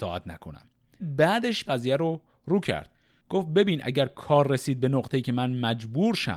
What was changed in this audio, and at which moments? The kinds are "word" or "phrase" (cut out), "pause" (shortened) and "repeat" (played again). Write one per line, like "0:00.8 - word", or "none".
0:01.0 - word
0:01.7 - word